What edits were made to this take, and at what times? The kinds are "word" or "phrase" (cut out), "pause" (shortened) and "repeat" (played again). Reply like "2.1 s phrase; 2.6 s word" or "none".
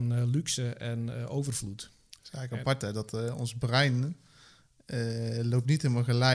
none